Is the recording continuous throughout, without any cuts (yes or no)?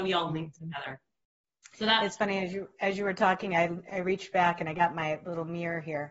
yes